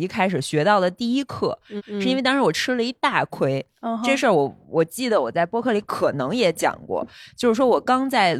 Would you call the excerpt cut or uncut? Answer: cut